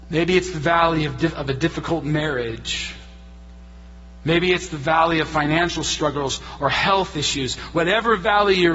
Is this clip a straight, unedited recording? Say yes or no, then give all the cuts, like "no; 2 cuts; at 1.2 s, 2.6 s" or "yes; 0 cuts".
yes; 0 cuts